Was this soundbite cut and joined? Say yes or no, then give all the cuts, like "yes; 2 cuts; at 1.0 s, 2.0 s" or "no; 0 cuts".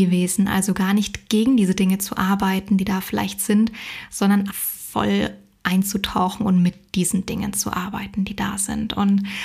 yes; 1 cut; at 4.5 s